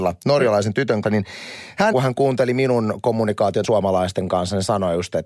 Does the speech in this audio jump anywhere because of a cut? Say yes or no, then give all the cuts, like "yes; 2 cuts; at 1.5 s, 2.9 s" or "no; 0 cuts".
yes; 3 cuts; at 1.0 s, 1.9 s, 3.6 s